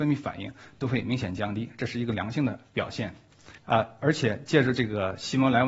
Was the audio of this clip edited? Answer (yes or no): yes